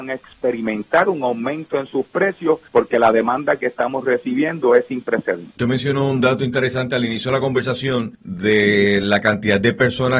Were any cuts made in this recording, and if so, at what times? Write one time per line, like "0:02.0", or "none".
0:02.7